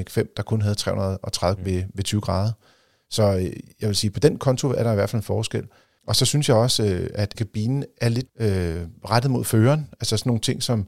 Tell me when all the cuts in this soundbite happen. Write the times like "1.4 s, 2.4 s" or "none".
1.6 s, 7.3 s, 8.3 s